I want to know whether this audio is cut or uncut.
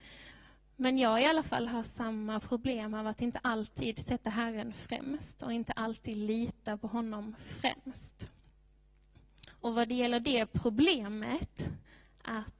uncut